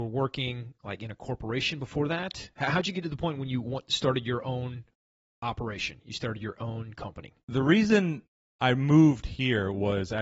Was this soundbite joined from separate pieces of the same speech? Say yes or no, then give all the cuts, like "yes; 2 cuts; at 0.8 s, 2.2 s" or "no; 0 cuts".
no; 0 cuts